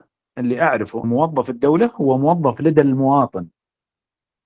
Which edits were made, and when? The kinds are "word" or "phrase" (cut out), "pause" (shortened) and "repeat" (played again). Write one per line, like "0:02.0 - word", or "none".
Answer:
0:01.0 - word

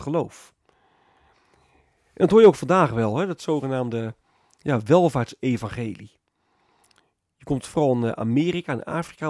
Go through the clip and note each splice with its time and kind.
none

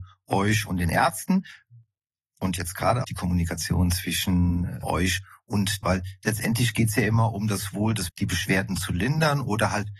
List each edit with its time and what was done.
0:03.0 - word
0:04.8 - word
0:05.8 - word
0:08.1 - word

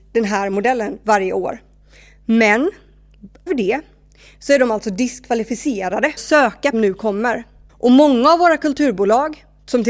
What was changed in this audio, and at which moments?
0:03.5 - word
0:06.2 - phrase
0:06.7 - phrase
0:07.7 - pause

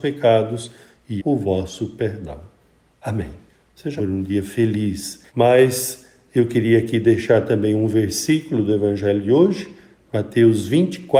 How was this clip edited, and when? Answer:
0:01.2 - word
0:04.0 - phrase
0:05.3 - pause

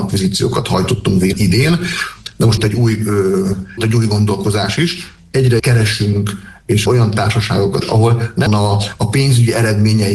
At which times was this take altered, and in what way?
0:01.3 - word
0:02.6 - word
0:03.8 - word
0:05.6 - word
0:06.9 - word
0:07.8 - word
0:08.5 - word

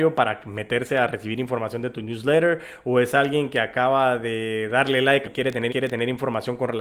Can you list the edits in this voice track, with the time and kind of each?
0:05.2 - phrase
0:05.7 - repeat

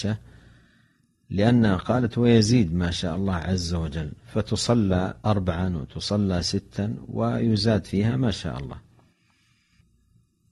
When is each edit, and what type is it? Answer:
0:05.2 - pause

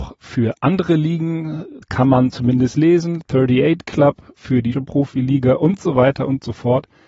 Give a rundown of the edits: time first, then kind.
0:01.8 - pause
0:04.7 - word

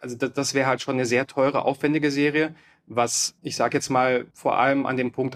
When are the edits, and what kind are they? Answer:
0:03.4 - pause
0:04.3 - pause

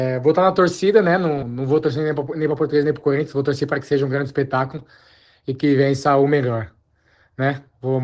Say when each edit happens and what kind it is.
0:01.4 - word

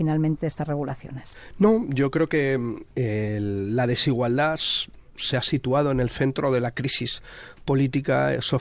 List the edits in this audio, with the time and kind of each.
none

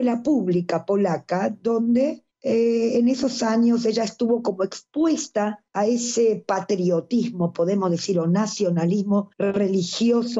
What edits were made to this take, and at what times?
0:02.3 - pause
0:05.7 - pause
0:09.3 - pause

